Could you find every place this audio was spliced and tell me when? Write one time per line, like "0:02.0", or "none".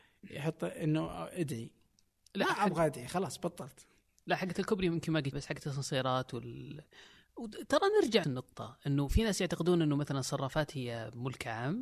0:05.3
0:08.2